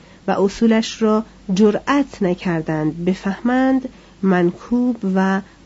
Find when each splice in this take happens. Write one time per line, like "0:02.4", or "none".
none